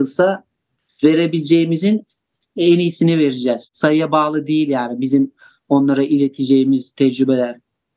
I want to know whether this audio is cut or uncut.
uncut